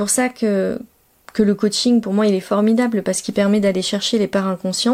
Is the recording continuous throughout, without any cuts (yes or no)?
yes